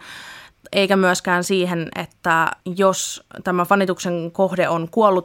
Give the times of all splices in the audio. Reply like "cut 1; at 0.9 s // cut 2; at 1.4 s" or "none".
cut 1; at 2.6 s